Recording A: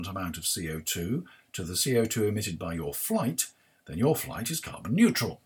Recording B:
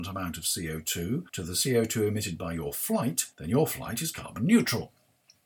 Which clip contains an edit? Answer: B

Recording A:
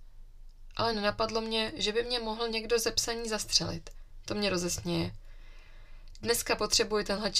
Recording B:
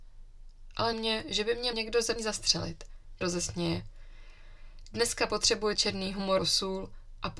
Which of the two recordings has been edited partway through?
B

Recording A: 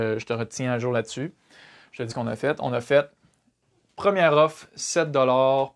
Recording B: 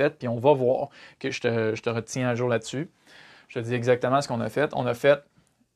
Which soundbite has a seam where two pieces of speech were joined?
A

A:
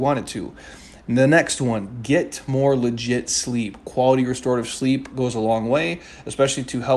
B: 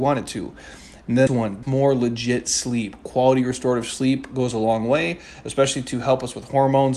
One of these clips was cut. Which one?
B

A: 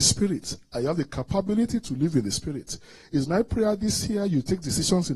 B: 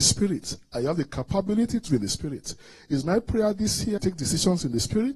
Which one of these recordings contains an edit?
B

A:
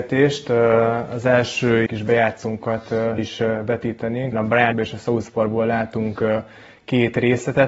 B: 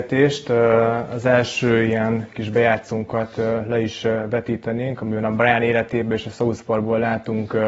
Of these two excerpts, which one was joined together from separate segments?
A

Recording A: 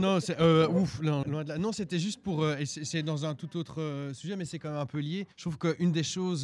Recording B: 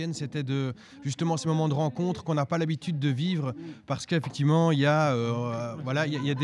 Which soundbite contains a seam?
A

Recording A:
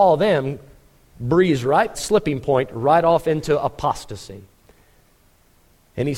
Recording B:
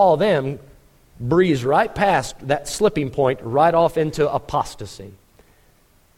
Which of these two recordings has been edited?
A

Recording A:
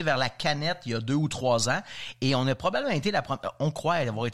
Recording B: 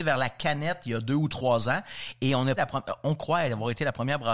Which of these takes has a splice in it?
B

